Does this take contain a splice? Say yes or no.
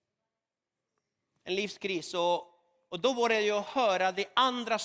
no